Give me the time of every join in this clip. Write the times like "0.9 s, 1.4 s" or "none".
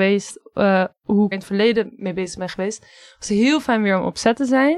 1.3 s